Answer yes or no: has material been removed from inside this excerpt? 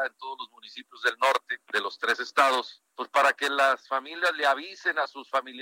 yes